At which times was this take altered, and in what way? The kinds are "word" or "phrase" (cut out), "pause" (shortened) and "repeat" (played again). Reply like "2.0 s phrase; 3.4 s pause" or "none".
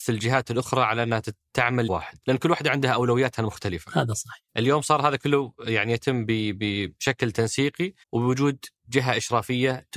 1.9 s word; 2.2 s pause; 8.0 s pause